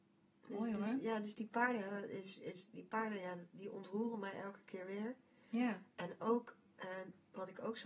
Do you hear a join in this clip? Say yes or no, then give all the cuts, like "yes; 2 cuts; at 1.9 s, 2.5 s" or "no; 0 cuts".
no; 0 cuts